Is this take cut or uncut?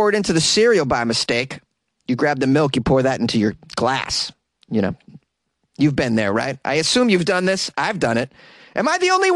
uncut